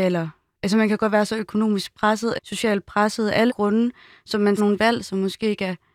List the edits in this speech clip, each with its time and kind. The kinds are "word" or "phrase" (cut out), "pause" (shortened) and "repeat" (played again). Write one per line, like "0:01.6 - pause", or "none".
0:02.4 - word
0:03.5 - word
0:04.6 - word